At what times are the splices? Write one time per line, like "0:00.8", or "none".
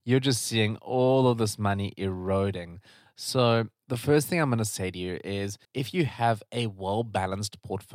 0:05.6